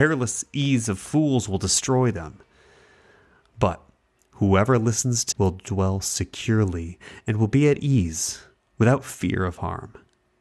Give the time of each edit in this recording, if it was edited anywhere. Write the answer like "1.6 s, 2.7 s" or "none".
5.3 s